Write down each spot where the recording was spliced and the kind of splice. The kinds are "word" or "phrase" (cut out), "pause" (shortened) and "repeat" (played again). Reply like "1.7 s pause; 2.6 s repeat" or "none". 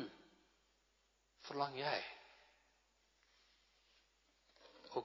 none